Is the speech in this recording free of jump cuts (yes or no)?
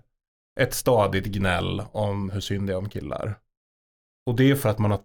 yes